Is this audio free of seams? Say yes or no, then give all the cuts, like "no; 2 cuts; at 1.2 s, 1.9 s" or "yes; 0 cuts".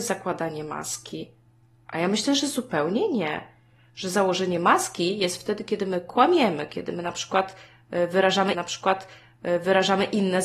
no; 1 cut; at 8.5 s